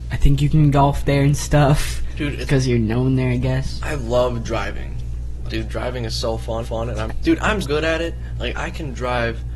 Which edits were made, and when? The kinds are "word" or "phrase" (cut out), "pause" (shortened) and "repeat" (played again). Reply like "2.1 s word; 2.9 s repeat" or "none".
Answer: 2.5 s word; 5.5 s phrase; 6.6 s repeat; 7.1 s word; 7.6 s word

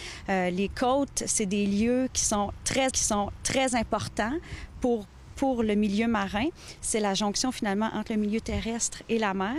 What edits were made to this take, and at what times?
2.9 s repeat

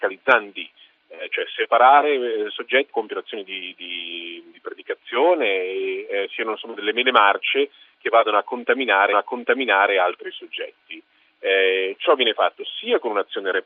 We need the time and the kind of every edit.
2.9 s phrase; 9.1 s repeat

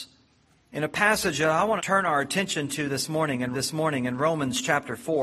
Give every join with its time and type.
1.8 s word; 3.5 s repeat

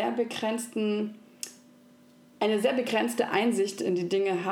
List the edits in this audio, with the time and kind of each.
none

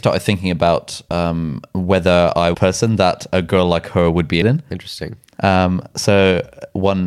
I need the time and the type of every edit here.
2.5 s phrase; 4.4 s word

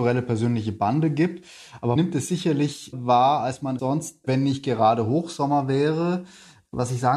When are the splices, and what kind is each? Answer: 2.0 s word; 2.9 s word; 3.8 s word; 4.2 s word

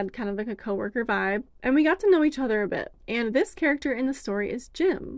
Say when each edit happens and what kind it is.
1.5 s pause; 3.0 s pause

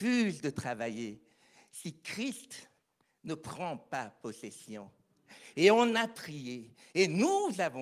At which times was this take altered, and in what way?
none

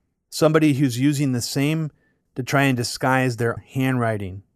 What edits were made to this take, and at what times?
2.3 s word; 3.6 s word

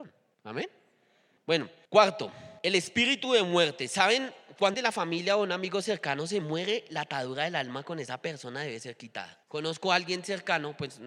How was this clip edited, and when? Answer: 2.6 s pause; 4.7 s word; 9.4 s pause

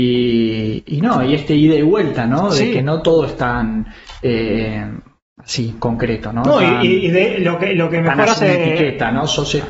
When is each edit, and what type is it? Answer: none

